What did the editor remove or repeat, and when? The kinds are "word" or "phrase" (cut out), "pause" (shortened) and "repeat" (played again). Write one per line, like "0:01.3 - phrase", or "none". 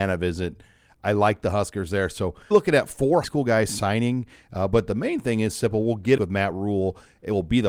0:02.5 - word
0:03.2 - word
0:06.2 - phrase